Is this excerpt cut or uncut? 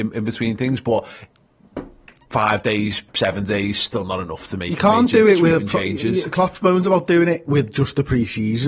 uncut